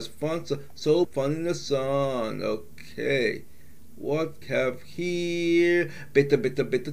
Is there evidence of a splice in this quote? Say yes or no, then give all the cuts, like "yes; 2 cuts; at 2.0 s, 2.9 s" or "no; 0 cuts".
yes; 2 cuts; at 1.0 s, 4.4 s